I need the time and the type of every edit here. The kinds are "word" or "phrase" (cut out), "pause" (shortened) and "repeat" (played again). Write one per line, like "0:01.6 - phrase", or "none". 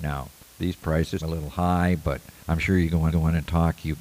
0:01.2 - word
0:02.4 - pause
0:03.1 - repeat